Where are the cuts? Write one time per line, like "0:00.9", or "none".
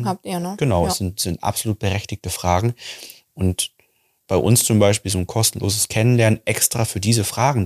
0:04.2